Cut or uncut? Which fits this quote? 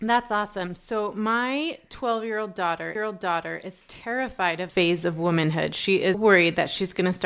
cut